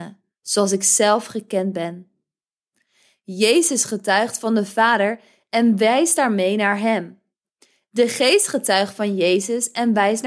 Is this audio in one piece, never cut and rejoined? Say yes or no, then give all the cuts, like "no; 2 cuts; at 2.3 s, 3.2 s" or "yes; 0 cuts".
yes; 0 cuts